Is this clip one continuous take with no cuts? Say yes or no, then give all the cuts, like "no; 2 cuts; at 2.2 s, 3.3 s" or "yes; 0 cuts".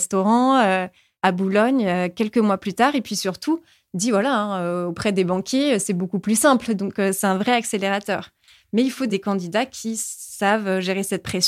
yes; 0 cuts